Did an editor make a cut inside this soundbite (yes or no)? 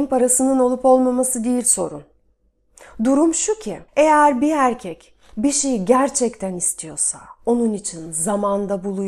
yes